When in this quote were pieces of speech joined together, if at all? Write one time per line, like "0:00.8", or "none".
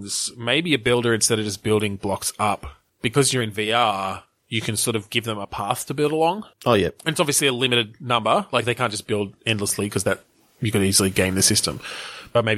0:06.5